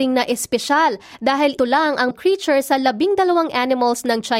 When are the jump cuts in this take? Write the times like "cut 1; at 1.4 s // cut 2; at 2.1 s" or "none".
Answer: cut 1; at 1.6 s // cut 2; at 2.1 s